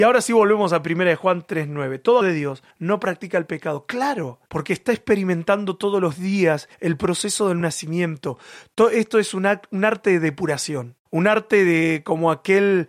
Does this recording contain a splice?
yes; 6 cuts; at 2.2 s, 2.7 s, 4.5 s, 6.7 s, 7.6 s, 11.1 s

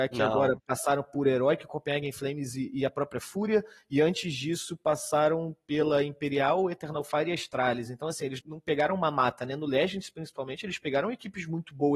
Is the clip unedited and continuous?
no; 1 cut; at 8.4 s

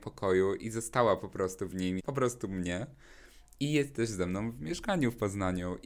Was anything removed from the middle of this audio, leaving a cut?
yes; 1 cut; at 2.0 s

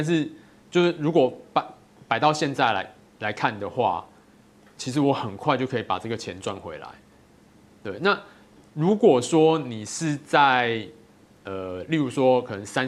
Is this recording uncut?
yes; 0 cuts

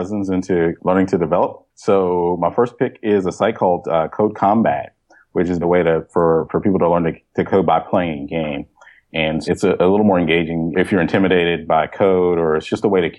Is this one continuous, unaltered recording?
no; 2 cuts; at 5.6 s, 9.4 s

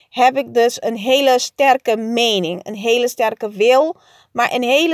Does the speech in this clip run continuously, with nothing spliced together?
yes; 0 cuts

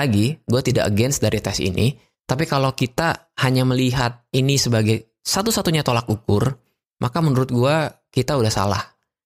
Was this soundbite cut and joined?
no; 0 cuts

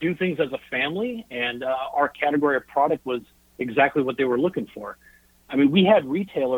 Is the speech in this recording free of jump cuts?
yes; 0 cuts

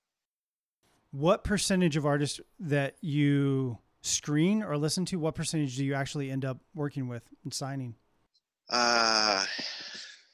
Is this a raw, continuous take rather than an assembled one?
yes; 0 cuts

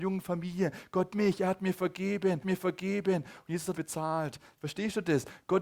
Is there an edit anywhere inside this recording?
yes; 3 cuts; at 1.1 s, 2.4 s, 3.7 s

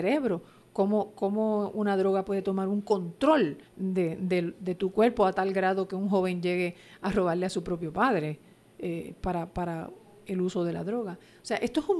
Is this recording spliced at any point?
yes; 1 cut; at 3.7 s

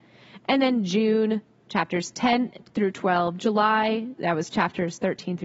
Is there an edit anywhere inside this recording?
yes; 1 cut; at 4.2 s

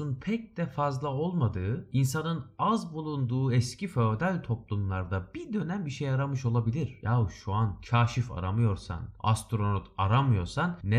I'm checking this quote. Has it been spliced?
no; 0 cuts

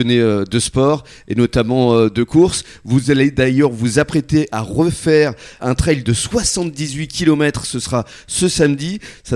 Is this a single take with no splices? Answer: yes; 0 cuts

